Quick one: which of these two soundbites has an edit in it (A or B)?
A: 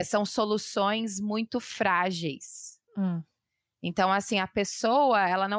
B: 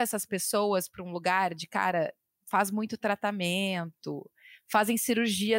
A